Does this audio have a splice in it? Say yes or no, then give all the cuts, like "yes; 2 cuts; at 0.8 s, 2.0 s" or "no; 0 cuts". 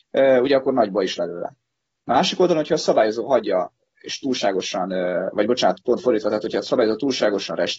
yes; 1 cut; at 1.2 s